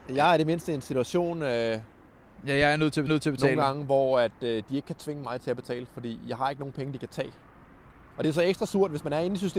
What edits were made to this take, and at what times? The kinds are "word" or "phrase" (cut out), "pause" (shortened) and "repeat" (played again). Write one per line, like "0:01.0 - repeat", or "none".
0:03.1 - repeat